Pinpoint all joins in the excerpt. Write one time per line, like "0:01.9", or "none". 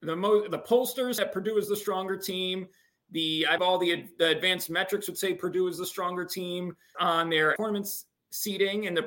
0:01.2
0:03.6
0:06.9
0:07.6